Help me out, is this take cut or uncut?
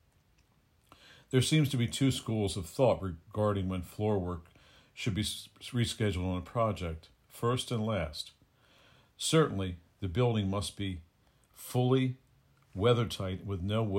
uncut